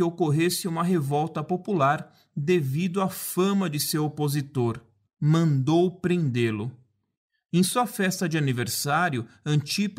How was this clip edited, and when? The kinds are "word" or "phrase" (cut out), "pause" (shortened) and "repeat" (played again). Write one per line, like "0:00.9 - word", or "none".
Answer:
0:05.1 - pause